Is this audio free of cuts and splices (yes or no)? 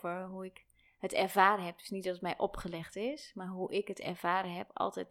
yes